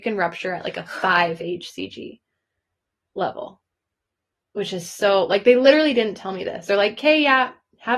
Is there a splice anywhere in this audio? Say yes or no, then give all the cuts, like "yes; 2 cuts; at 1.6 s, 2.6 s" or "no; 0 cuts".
no; 0 cuts